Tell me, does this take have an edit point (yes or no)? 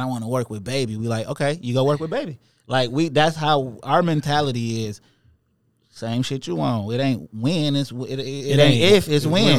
no